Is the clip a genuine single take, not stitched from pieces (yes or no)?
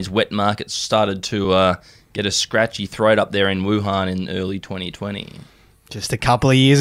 yes